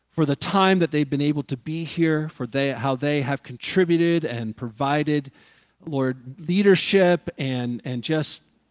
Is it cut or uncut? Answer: uncut